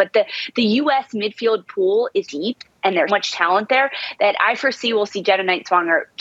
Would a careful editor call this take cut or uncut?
cut